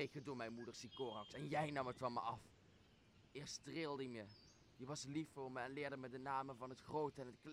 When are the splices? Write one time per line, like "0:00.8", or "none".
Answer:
none